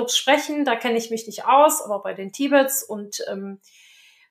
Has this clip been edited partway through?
no; 0 cuts

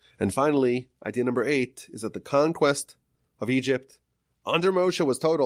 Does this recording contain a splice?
no; 0 cuts

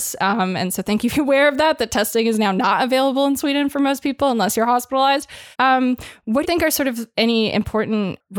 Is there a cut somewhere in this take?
yes; 3 cuts; at 1.1 s, 5.5 s, 6.4 s

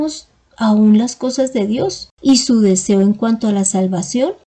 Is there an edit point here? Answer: yes; 1 cut; at 2.1 s

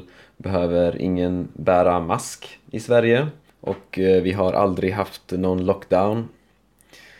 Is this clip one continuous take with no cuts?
no; 1 cut; at 3.5 s

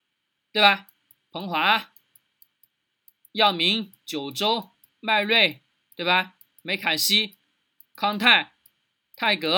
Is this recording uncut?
yes; 0 cuts

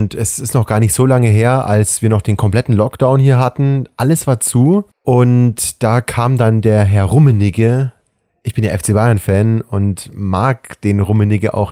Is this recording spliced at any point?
no; 0 cuts

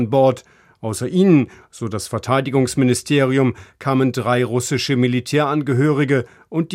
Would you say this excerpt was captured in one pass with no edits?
yes; 0 cuts

